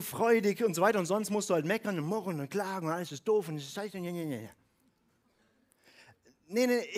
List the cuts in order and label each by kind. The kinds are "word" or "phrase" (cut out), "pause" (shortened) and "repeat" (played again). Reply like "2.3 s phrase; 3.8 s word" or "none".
none

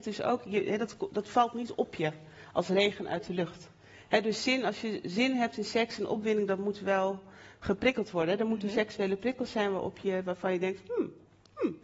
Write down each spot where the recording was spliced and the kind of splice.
none

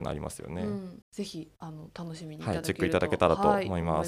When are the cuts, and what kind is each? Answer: 1.0 s pause; 1.5 s pause

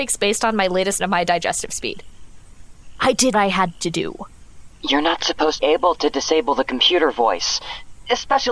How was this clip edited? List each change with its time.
1.0 s phrase; 3.3 s word; 5.6 s phrase

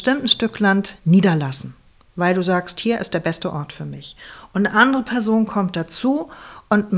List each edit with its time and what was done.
none

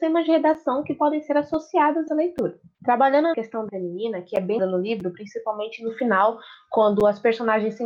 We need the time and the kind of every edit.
2.1 s word; 3.3 s word; 3.7 s word; 4.6 s word

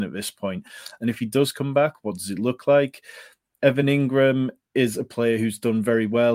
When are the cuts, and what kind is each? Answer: none

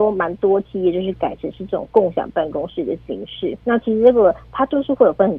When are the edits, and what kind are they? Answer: 3.6 s pause

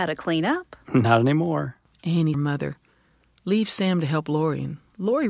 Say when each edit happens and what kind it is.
2.3 s phrase

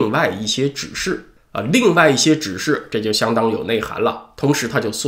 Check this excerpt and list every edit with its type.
1.4 s pause

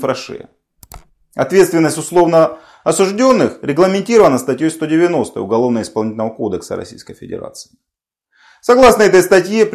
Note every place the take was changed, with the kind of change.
none

